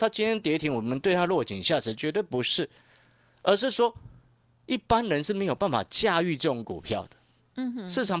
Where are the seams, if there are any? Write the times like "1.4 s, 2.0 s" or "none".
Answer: none